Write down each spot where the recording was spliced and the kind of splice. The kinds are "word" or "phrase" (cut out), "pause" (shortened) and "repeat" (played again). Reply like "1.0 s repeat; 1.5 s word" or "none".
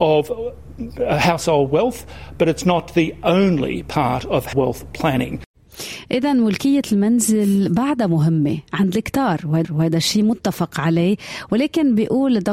4.5 s word; 9.6 s repeat